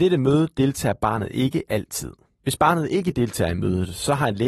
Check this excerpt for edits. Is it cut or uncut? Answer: uncut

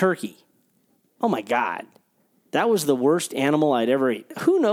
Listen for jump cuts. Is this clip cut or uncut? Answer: uncut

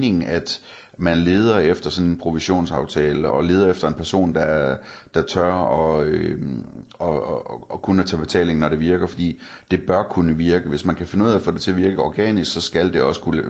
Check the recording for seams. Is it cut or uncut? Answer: cut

